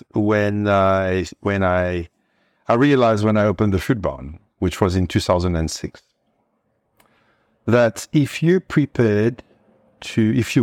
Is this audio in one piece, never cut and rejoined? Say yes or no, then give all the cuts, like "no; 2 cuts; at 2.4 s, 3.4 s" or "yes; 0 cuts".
yes; 0 cuts